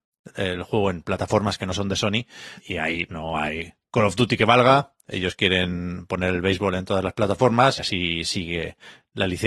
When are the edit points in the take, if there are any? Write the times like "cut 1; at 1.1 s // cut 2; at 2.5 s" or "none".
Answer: cut 1; at 2.6 s // cut 2; at 3.1 s // cut 3; at 7.8 s